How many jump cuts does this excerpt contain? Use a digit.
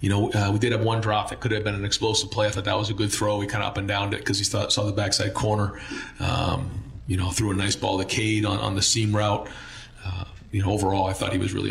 0